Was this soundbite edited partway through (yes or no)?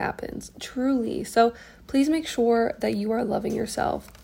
no